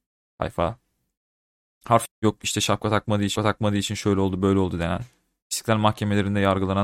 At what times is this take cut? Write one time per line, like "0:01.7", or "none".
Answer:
0:02.1
0:03.4